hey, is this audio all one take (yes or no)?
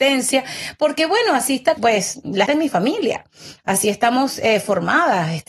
no